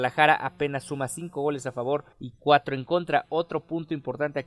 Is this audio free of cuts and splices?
no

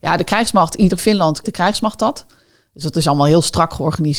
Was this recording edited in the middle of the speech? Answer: yes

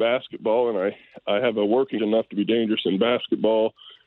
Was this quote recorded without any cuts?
no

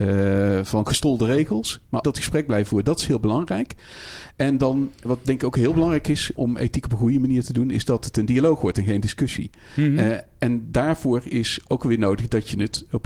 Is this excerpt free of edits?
no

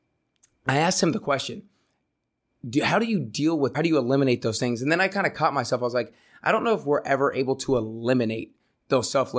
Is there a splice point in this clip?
yes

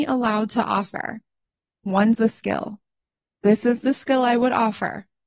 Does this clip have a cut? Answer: yes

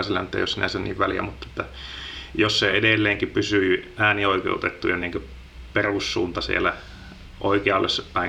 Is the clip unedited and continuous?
yes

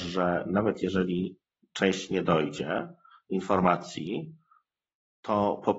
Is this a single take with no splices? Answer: yes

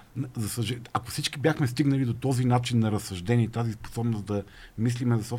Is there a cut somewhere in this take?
no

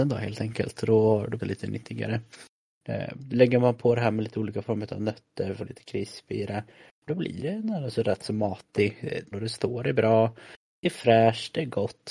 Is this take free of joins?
no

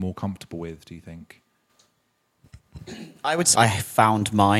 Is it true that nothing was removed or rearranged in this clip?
no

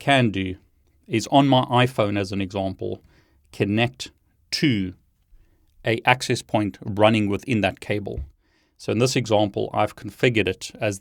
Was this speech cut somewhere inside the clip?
no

